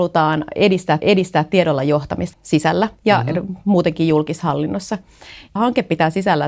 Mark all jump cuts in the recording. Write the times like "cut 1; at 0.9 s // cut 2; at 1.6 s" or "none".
cut 1; at 1.0 s // cut 2; at 2.3 s // cut 3; at 5.6 s